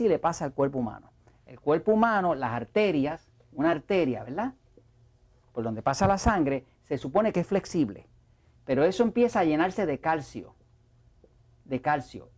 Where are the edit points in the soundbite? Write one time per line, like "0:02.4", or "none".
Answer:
none